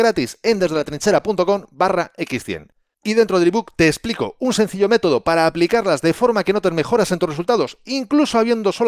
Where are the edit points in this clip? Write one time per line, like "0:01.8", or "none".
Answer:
none